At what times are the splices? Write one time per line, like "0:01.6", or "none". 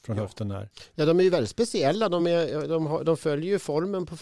none